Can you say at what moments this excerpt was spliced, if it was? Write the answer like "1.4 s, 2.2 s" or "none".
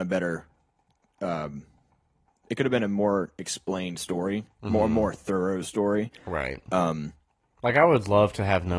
none